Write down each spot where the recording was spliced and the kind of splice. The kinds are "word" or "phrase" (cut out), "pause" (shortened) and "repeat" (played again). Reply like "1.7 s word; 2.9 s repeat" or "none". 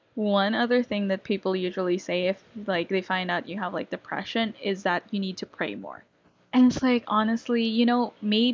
6.2 s pause